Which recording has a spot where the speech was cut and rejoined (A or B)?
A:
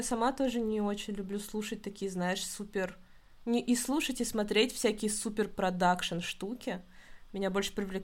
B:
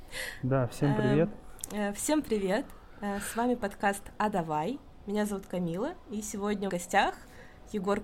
B